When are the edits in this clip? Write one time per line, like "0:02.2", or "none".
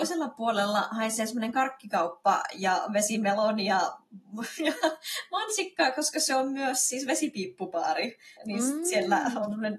0:08.3